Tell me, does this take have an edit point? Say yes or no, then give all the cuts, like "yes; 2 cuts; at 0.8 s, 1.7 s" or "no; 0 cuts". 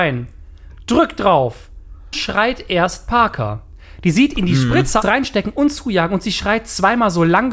yes; 2 cuts; at 2.1 s, 5.0 s